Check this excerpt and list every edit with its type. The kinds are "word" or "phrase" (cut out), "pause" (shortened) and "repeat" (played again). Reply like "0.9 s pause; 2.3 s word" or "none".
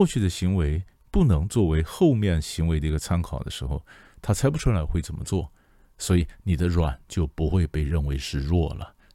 none